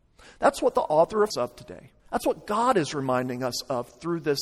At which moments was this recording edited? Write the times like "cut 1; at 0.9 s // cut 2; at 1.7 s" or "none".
cut 1; at 1.3 s // cut 2; at 2.0 s